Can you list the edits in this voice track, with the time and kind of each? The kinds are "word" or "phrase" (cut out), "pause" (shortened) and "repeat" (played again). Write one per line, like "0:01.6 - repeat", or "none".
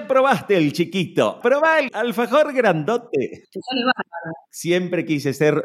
0:01.4 - word
0:01.9 - word